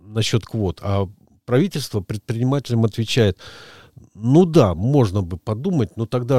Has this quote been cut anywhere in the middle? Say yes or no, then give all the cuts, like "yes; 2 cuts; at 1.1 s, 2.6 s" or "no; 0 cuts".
no; 0 cuts